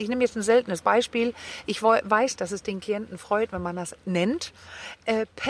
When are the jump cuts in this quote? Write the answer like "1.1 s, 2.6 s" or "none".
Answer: 2.4 s